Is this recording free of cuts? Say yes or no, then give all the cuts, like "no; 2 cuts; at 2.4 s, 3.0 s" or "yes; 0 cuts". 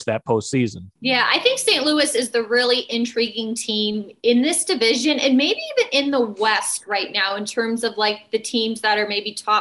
no; 1 cut; at 1.0 s